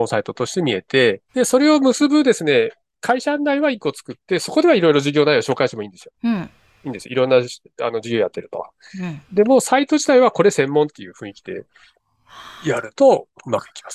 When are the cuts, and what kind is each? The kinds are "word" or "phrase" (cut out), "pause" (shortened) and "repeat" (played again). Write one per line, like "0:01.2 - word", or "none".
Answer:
0:01.3 - pause
0:06.2 - pause